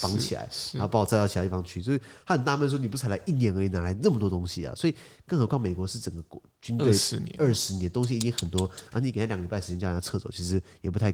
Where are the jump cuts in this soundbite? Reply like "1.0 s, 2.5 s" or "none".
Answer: none